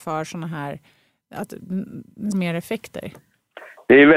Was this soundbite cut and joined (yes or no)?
yes